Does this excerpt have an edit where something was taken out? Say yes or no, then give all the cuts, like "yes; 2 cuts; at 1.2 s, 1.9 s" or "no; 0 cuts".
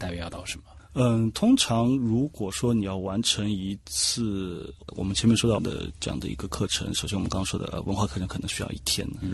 yes; 1 cut; at 5.6 s